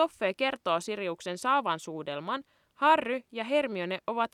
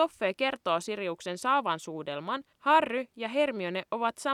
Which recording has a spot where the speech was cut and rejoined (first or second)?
second